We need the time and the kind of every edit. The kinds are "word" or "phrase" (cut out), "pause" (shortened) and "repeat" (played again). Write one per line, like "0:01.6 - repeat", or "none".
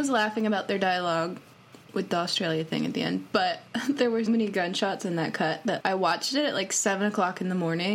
0:04.3 - word
0:05.8 - word